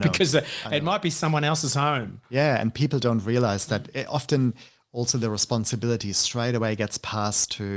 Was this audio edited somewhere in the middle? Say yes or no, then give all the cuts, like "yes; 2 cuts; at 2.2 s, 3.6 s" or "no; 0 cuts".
no; 0 cuts